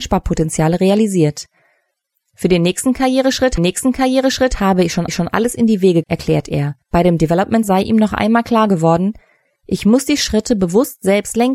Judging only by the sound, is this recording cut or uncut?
cut